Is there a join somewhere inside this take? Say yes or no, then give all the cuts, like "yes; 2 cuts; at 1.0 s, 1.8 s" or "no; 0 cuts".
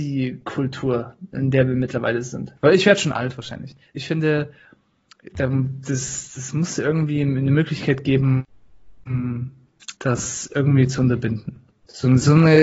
yes; 1 cut; at 9.9 s